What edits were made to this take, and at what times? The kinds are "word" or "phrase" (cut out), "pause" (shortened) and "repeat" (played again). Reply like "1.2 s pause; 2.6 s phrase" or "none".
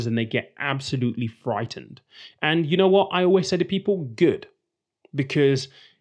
none